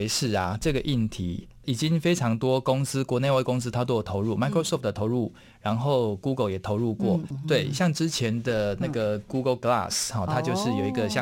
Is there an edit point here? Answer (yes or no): no